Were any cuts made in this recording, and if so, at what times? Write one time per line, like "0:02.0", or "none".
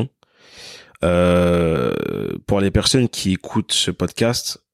none